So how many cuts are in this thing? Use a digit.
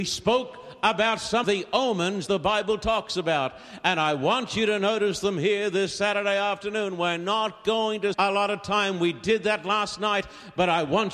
3